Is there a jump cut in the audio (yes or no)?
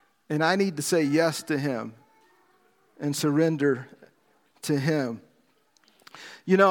no